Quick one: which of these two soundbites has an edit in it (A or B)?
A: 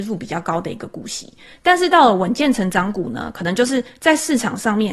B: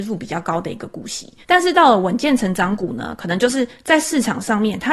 B